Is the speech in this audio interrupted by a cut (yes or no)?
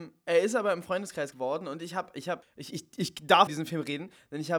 yes